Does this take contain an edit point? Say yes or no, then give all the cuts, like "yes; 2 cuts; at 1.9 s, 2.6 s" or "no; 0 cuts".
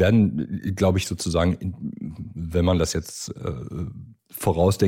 no; 0 cuts